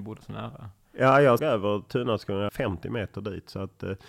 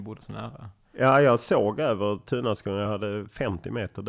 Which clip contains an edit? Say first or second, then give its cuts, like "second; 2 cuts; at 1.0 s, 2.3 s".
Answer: first; 2 cuts; at 1.4 s, 2.5 s